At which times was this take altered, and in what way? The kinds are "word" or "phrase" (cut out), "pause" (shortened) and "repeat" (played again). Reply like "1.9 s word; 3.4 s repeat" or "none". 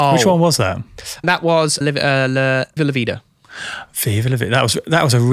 1.2 s word; 1.8 s word; 2.8 s word